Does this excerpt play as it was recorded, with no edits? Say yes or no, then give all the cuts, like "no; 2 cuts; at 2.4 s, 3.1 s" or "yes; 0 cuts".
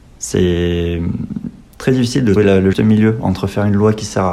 no; 2 cuts; at 2.4 s, 2.7 s